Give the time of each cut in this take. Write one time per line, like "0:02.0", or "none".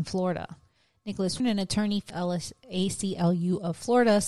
0:01.4
0:02.1